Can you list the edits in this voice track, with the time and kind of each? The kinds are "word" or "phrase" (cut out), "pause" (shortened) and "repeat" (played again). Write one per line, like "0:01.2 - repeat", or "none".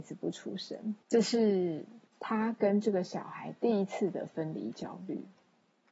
0:01.0 - pause
0:02.1 - pause